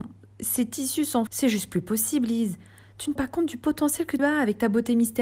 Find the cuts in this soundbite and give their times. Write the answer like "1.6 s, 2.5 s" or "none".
1.3 s, 3.2 s, 4.2 s